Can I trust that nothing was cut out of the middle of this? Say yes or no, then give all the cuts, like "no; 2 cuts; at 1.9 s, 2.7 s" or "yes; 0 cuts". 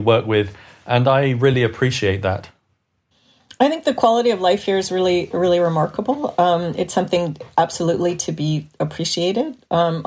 yes; 0 cuts